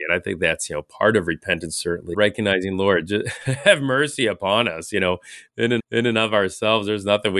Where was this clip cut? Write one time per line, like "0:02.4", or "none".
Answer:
0:02.1
0:05.8